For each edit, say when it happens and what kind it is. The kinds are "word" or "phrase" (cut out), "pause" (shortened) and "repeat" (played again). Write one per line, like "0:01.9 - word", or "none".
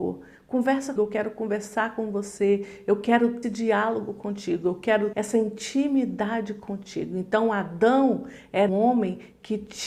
0:01.0 - word
0:03.4 - phrase
0:05.1 - word
0:08.7 - word